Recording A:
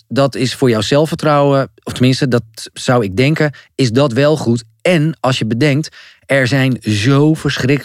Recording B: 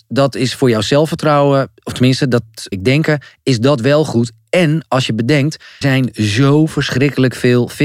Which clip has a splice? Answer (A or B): B